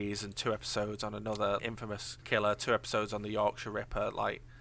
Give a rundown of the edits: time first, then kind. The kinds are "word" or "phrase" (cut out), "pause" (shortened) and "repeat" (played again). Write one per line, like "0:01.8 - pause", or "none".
0:01.6 - word
0:02.2 - pause